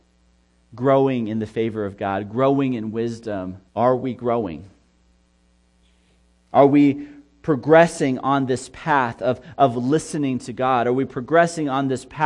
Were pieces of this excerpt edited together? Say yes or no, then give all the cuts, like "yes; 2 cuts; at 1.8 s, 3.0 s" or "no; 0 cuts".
yes; 1 cut; at 3.7 s